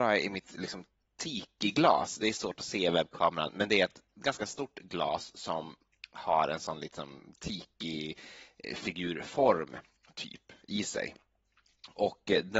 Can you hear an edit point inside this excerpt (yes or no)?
no